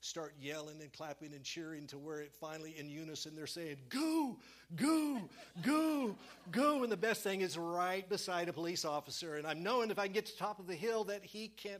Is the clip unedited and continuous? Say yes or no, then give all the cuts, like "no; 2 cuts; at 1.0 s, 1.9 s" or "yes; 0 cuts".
yes; 0 cuts